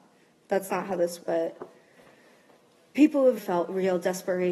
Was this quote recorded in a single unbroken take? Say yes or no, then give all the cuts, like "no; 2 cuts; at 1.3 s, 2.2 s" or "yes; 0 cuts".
no; 2 cuts; at 1.2 s, 3.4 s